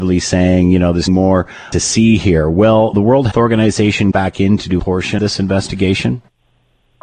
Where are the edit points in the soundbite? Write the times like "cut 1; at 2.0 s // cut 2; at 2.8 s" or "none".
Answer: cut 1; at 1.1 s // cut 2; at 1.7 s // cut 3; at 2.9 s // cut 4; at 3.3 s // cut 5; at 4.1 s // cut 6; at 4.8 s // cut 7; at 5.2 s